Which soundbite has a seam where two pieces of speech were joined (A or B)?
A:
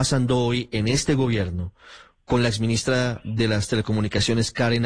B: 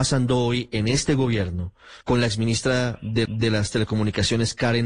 B